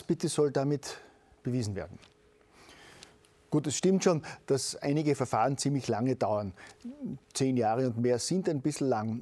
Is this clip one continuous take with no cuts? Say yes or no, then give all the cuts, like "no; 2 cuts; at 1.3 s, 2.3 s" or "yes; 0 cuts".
yes; 0 cuts